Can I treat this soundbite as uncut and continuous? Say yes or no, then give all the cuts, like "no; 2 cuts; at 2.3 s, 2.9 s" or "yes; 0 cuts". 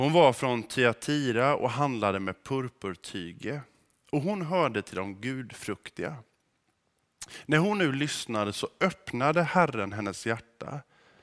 yes; 0 cuts